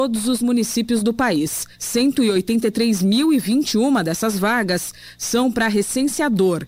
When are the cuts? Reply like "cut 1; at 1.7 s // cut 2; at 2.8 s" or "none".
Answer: cut 1; at 1.7 s